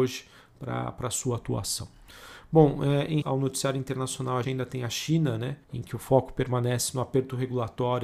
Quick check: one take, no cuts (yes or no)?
no